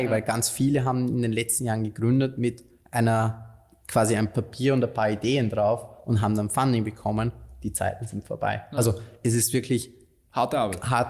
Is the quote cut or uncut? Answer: uncut